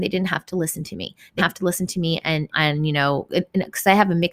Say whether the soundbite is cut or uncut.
cut